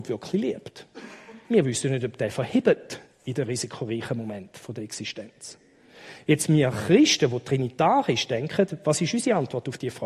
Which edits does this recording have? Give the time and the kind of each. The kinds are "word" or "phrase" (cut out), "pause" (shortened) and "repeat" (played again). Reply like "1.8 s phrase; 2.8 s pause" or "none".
1.4 s pause